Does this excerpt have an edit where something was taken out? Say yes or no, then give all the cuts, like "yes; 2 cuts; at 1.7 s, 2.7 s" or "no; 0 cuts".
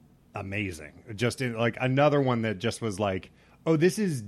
no; 0 cuts